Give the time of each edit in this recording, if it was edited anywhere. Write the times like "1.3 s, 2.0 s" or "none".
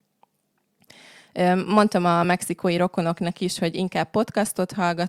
none